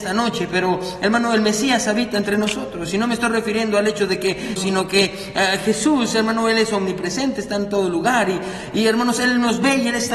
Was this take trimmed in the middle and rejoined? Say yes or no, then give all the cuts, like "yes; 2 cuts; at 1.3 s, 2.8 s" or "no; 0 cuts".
yes; 1 cut; at 4.6 s